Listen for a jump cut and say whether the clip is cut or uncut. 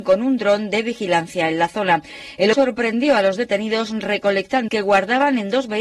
cut